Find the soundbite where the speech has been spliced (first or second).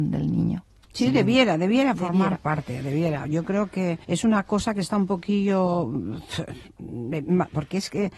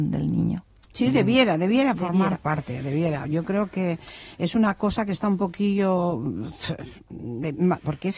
first